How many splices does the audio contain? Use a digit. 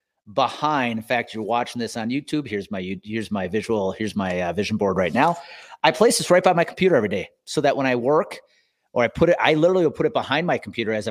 0